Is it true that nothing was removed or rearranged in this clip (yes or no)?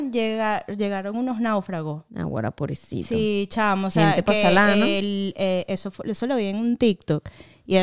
no